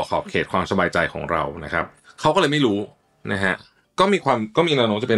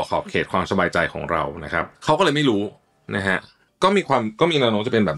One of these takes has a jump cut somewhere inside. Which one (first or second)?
second